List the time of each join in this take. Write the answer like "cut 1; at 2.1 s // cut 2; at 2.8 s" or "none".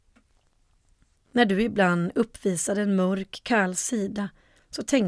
none

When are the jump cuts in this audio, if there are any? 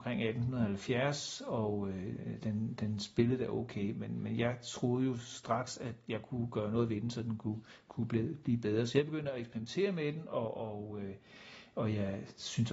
none

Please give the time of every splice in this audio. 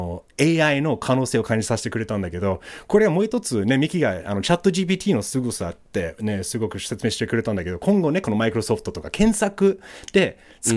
none

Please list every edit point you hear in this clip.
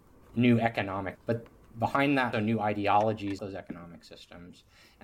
cut 1; at 1.1 s // cut 2; at 2.3 s // cut 3; at 3.4 s

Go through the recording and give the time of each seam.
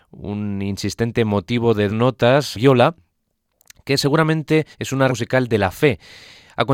cut 1; at 1.9 s // cut 2; at 2.5 s // cut 3; at 4.7 s // cut 4; at 5.1 s

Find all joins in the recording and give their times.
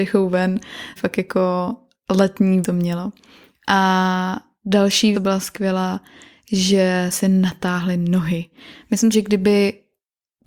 cut 1; at 1.0 s // cut 2; at 2.6 s // cut 3; at 5.1 s // cut 4; at 7.1 s // cut 5; at 9.1 s

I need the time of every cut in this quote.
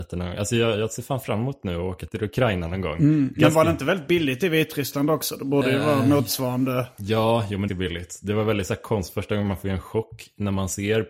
cut 1; at 7.7 s

